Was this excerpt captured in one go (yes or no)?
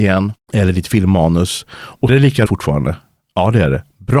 no